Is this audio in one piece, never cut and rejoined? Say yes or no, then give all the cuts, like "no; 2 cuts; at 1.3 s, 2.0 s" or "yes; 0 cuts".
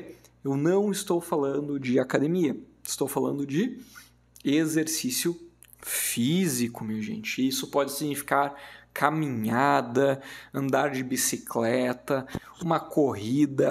yes; 0 cuts